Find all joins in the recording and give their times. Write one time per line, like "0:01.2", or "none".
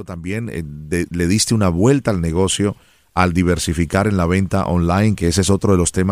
none